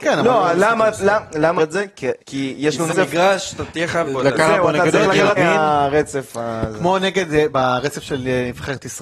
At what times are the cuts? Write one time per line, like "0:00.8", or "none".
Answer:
0:01.6
0:02.2
0:02.9
0:04.1
0:05.4
0:07.5